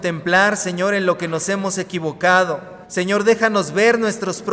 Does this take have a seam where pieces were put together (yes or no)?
yes